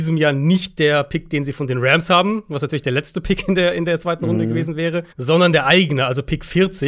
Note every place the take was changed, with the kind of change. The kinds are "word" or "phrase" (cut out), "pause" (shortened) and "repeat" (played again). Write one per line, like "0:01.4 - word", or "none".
0:05.1 - pause

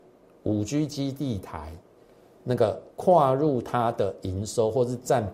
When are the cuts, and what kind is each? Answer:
0:02.9 - pause

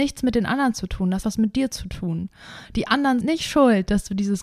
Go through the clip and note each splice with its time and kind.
0:01.2 - word
0:03.2 - word

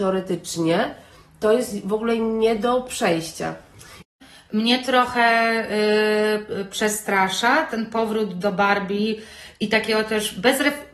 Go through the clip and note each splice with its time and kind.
none

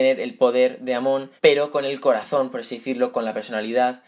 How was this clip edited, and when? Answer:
0:01.4 - pause

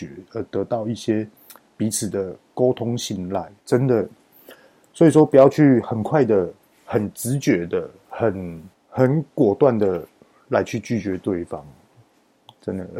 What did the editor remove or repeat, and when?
0:03.6 - pause

